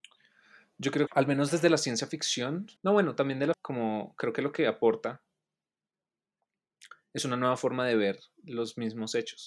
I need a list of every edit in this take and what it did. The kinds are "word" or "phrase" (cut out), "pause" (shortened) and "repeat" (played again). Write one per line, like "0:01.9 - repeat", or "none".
0:01.1 - word
0:02.8 - pause
0:03.5 - word